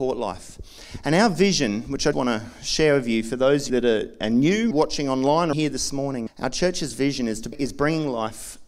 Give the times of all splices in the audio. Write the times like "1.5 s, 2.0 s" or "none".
2.1 s, 3.7 s, 4.7 s, 5.5 s, 6.3 s, 7.5 s